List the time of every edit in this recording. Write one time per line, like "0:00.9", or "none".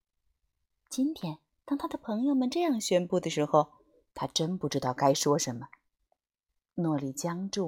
0:01.6